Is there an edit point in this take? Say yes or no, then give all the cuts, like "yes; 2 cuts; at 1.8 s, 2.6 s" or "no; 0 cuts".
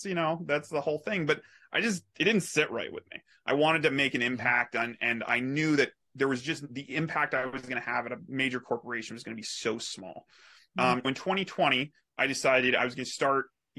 yes; 1 cut; at 11.0 s